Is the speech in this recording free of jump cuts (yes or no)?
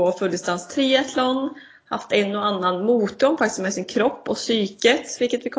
yes